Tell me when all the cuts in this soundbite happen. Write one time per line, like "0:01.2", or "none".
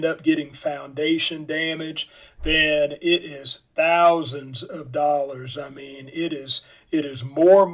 none